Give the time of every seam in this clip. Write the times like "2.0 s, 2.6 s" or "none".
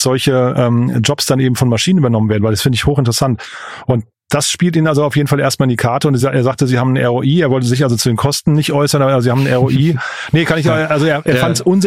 none